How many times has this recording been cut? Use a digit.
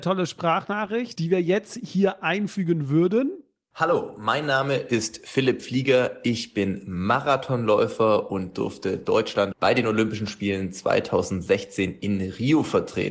1